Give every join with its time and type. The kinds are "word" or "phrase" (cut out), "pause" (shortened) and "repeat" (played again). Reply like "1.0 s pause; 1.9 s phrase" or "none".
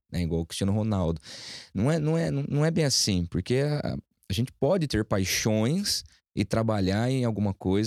none